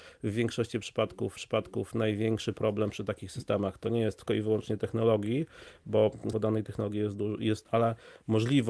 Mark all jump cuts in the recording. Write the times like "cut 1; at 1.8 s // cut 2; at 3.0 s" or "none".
cut 1; at 1.4 s // cut 2; at 4.3 s // cut 3; at 6.3 s // cut 4; at 7.6 s